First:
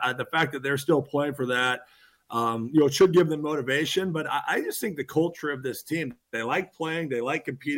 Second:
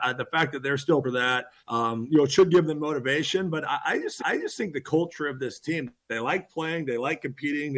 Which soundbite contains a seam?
second; 3 cuts; at 1.0 s, 1.6 s, 4.2 s

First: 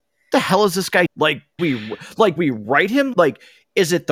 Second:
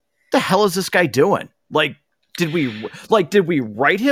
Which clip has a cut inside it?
first; 4 cuts; at 1.1 s, 1.6 s, 2.4 s, 3.1 s

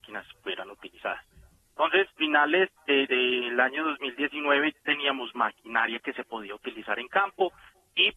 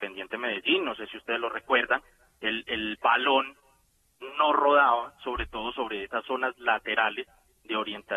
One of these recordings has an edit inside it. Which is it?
first; 3 cuts; at 2.2 s, 3.1 s, 4.8 s

